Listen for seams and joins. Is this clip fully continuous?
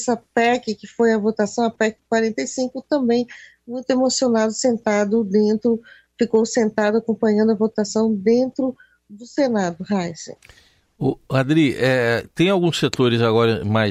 yes; 0 cuts

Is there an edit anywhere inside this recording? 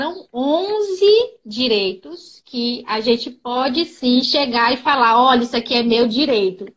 no; 0 cuts

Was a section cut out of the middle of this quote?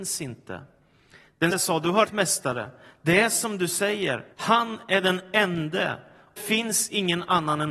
yes; 4 cuts; at 1.5 s, 2.0 s, 4.3 s, 6.4 s

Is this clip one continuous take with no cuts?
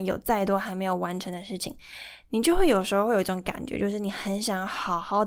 yes; 0 cuts

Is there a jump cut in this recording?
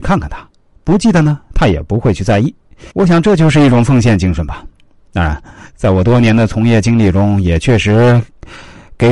yes; 1 cut; at 2.9 s

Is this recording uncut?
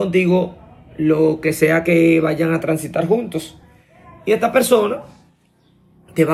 yes; 0 cuts

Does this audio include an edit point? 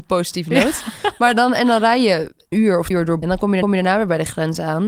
yes; 4 cuts; at 2.5 s, 2.9 s, 3.2 s, 3.6 s

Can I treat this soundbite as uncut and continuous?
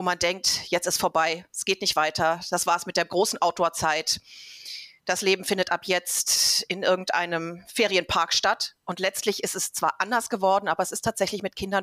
yes; 0 cuts

